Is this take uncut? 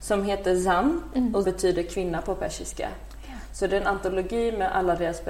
no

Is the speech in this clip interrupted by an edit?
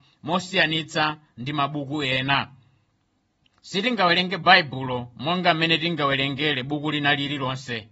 no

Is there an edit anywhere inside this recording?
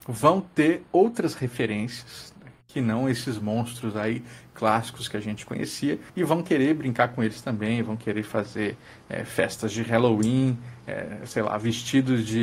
yes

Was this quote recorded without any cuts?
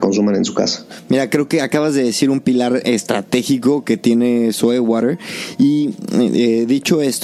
yes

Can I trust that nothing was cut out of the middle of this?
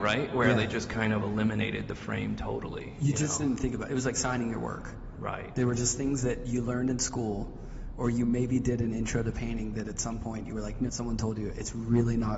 no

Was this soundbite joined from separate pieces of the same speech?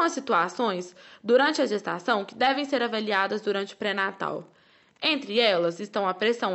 no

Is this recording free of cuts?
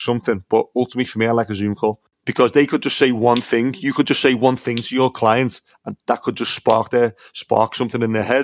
yes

